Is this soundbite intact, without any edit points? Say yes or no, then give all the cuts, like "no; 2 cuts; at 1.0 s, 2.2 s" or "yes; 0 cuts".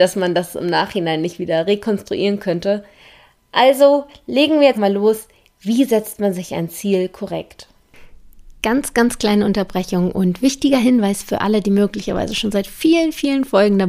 no; 1 cut; at 4.7 s